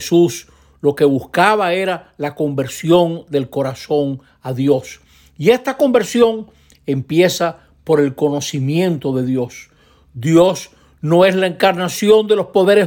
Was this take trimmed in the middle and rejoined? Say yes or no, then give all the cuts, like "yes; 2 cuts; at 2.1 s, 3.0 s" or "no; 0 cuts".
no; 0 cuts